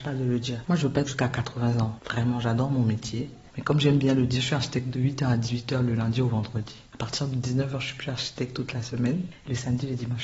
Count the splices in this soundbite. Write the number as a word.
one